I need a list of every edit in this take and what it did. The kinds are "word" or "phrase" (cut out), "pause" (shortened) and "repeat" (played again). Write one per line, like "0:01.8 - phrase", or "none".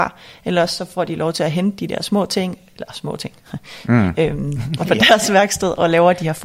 0:04.8 - phrase